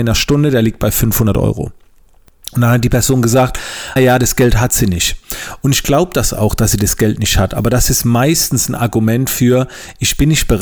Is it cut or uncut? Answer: cut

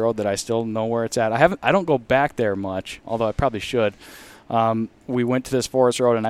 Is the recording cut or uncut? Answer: cut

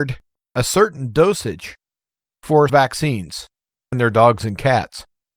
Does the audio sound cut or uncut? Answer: cut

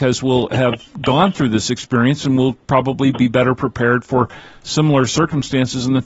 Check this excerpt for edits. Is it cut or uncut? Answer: uncut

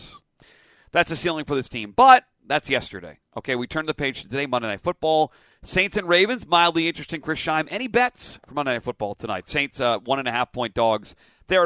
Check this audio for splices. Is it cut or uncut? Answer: uncut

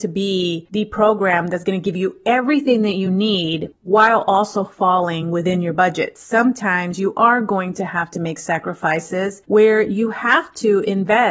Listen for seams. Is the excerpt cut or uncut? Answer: uncut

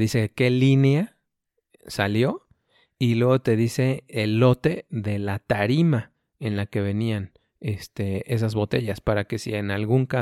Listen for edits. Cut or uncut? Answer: uncut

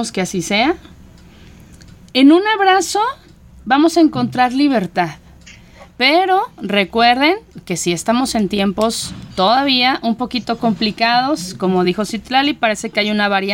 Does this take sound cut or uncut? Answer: uncut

